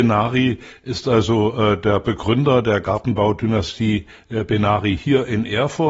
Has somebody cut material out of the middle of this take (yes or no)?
no